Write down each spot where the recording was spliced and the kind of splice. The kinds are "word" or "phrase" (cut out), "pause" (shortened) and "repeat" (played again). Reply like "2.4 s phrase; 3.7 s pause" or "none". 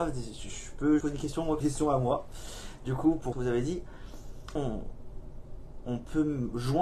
1.0 s word; 1.6 s phrase; 3.3 s phrase; 4.6 s word